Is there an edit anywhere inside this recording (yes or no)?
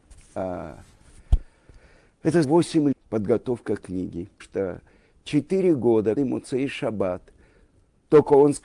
yes